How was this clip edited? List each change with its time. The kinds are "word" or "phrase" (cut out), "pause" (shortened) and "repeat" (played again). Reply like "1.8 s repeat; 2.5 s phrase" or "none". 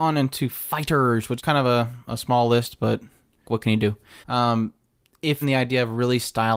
1.4 s word; 3.4 s word; 4.2 s pause; 5.4 s phrase